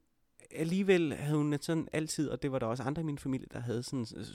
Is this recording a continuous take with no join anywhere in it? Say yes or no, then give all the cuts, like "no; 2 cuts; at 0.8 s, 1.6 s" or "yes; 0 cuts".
yes; 0 cuts